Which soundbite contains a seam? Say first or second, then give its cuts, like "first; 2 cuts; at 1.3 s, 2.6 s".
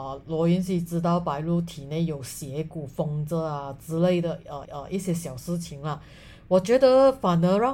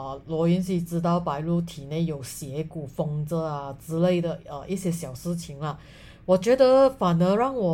first; 1 cut; at 4.6 s